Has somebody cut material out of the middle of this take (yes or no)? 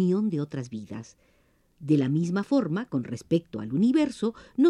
no